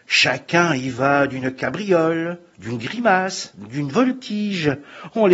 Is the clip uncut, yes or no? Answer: yes